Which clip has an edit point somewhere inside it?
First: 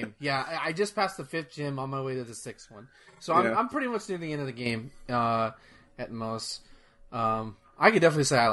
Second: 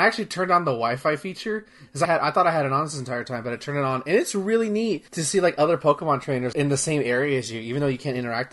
second; 3 cuts; at 2.0 s, 5.1 s, 6.5 s

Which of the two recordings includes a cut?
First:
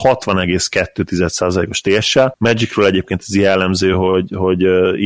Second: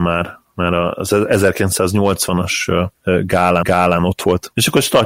second; 1 cut; at 3.6 s

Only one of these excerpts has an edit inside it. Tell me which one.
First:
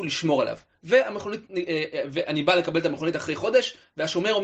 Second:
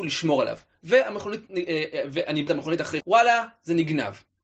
second; 2 cuts; at 2.5 s, 3.0 s

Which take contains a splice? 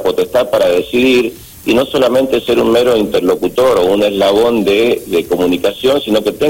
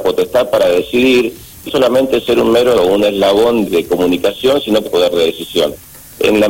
second; 4 cuts; at 1.7 s, 2.7 s, 3.6 s, 4.8 s

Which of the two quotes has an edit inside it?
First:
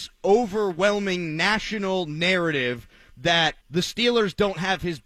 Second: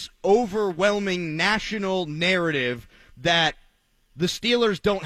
first; 1 cut; at 3.6 s

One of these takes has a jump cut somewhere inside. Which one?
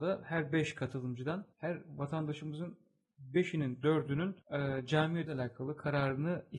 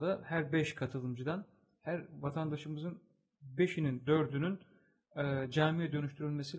first; 3 cuts; at 1.5 s, 4.4 s, 5.3 s

